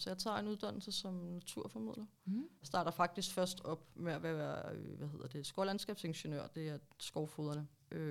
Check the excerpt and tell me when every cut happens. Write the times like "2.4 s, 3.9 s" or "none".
none

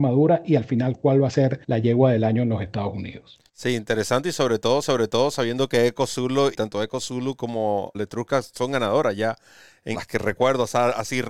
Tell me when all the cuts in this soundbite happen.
1.6 s, 3.5 s, 4.8 s, 6.5 s, 7.9 s, 9.9 s

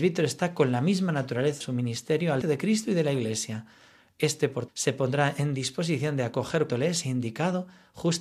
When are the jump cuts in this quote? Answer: 1.6 s, 2.4 s, 4.7 s, 6.7 s

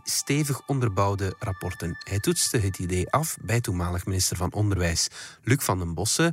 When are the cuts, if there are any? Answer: none

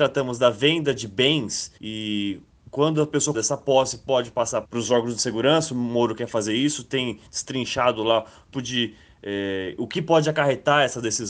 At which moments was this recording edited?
1.8 s, 3.3 s, 4.6 s, 8.5 s

